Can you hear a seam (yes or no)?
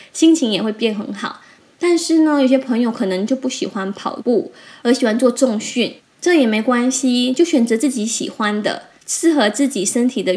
no